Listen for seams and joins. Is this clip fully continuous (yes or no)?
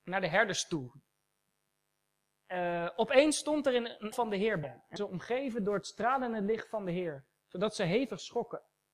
no